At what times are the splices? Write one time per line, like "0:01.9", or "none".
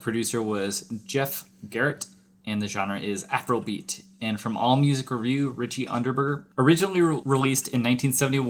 0:06.5